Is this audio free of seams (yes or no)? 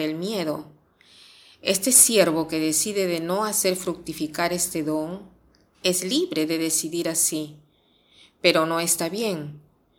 yes